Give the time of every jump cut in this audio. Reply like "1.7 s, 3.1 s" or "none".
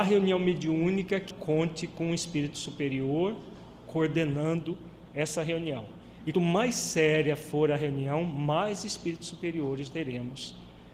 1.3 s, 6.3 s, 9.9 s